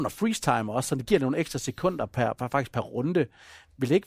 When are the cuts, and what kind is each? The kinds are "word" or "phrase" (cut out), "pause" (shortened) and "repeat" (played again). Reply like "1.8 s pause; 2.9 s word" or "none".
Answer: none